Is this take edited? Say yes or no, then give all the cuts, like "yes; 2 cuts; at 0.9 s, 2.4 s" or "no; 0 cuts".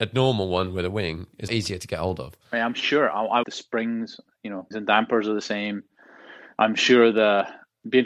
yes; 4 cuts; at 1.5 s, 2.4 s, 3.4 s, 4.7 s